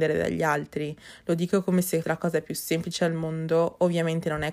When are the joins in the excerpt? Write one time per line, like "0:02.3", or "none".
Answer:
0:02.0